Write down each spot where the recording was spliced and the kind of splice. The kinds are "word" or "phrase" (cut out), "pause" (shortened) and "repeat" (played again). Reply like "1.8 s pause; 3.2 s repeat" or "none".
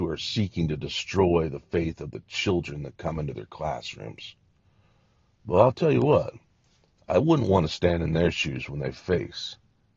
none